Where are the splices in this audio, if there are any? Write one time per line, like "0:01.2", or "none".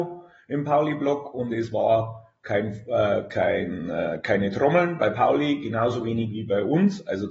none